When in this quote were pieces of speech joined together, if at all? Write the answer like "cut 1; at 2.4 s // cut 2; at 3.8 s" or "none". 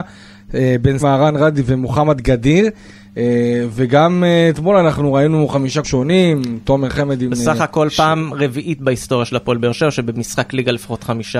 cut 1; at 1.0 s // cut 2; at 5.8 s